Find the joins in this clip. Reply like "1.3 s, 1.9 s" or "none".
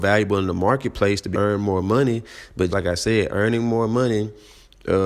1.3 s, 2.7 s